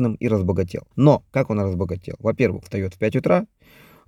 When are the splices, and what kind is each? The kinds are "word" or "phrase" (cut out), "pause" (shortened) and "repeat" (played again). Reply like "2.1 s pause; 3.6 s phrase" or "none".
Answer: 0.9 s pause; 2.6 s word